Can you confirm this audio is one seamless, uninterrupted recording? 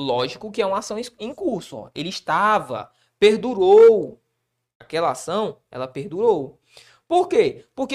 yes; 0 cuts

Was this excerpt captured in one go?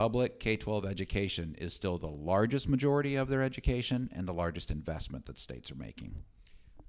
yes; 0 cuts

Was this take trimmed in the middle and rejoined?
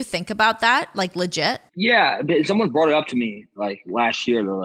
yes; 1 cut; at 1.7 s

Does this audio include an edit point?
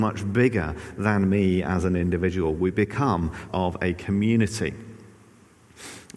yes; 1 cut; at 3.5 s

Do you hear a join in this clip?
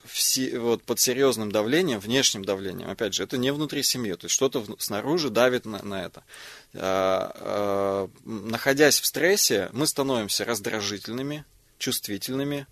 no; 0 cuts

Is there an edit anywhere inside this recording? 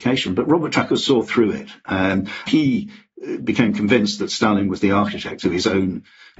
yes; 1 cut; at 2.5 s

